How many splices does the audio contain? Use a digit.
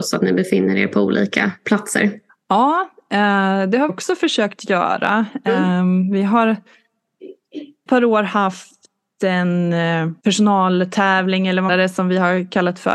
5